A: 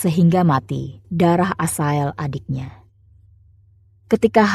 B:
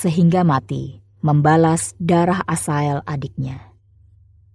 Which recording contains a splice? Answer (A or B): A